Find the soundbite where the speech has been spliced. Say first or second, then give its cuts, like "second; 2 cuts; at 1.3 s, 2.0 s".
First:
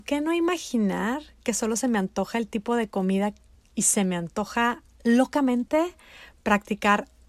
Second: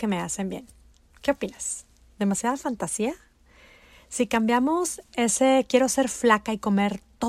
first; 1 cut; at 3.5 s